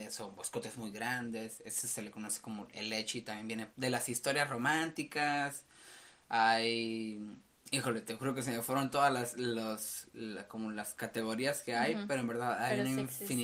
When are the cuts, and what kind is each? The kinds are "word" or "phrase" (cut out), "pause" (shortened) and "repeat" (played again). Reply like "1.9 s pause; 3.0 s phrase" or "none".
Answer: 3.7 s pause; 7.6 s pause